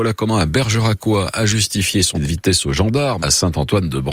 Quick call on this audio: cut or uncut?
cut